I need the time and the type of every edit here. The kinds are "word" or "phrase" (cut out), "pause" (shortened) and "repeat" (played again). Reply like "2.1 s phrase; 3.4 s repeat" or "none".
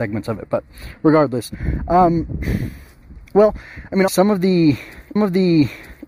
3.3 s pause; 4.1 s word; 5.2 s repeat